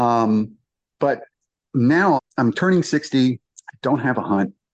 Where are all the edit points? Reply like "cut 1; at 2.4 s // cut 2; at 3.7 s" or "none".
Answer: cut 1; at 2.2 s